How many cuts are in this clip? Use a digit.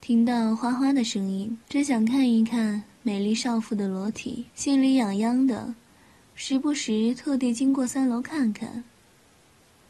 2